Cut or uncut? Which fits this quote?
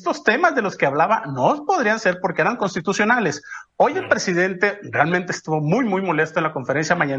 uncut